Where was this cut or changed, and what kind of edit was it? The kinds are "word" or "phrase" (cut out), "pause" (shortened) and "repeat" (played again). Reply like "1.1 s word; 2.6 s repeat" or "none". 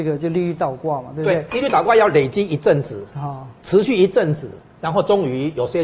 none

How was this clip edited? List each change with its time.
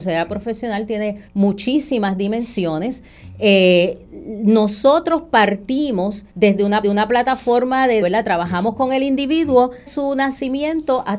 1.3 s pause; 6.3 s pause; 6.8 s repeat; 8.0 s word; 9.9 s word

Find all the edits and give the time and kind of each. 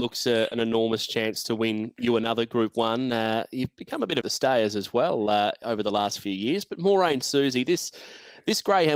4.2 s phrase

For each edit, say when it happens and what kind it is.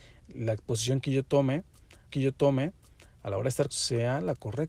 2.1 s repeat; 3.7 s word

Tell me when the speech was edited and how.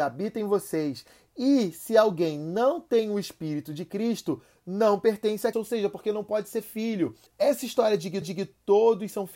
5.5 s word; 7.3 s pause; 8.2 s repeat

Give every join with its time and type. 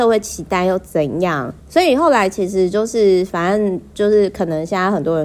1.6 s pause

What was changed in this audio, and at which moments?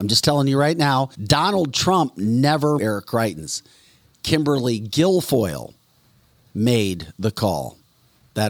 1.1 s pause; 2.8 s phrase

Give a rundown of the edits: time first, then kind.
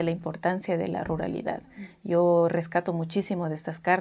none

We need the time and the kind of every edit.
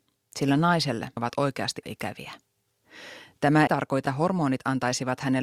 1.2 s word; 1.8 s word; 3.7 s word; 4.1 s word

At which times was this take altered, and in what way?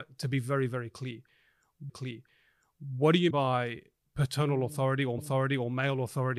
1.9 s repeat; 3.3 s word; 5.2 s repeat

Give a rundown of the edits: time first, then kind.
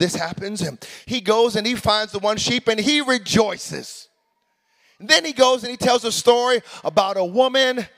none

